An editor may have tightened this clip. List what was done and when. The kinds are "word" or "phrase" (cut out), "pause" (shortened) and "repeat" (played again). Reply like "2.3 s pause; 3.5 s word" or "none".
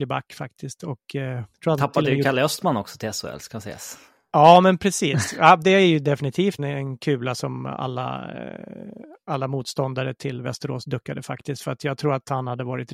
1.5 s pause; 6.6 s word